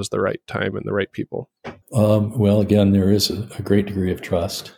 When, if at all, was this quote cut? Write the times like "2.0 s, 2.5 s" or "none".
1.8 s